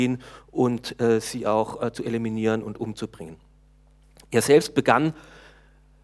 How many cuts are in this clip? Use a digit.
0